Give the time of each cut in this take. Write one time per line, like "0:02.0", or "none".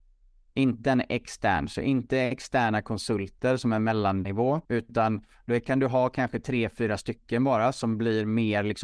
0:04.6